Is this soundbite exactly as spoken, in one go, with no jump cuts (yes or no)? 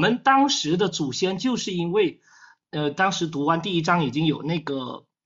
yes